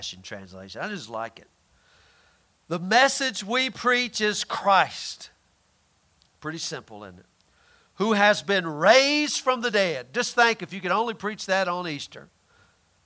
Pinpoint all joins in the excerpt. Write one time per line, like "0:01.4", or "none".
none

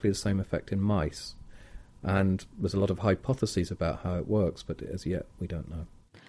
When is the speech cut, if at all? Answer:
none

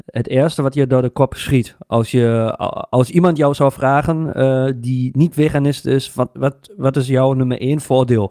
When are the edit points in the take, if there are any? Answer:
0:06.3

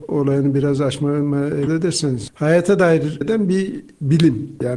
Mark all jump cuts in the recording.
0:01.7
0:03.2

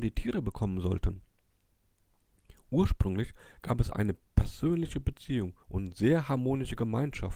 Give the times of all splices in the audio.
0:03.9
0:05.6

